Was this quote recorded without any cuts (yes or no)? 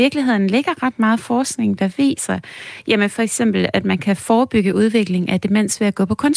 yes